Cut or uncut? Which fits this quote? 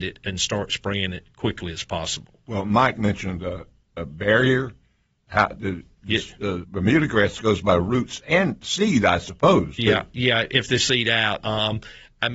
cut